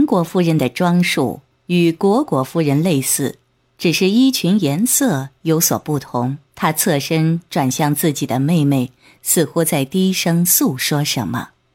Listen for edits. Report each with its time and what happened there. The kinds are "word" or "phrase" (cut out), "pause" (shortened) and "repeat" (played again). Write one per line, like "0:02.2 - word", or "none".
0:06.5 - pause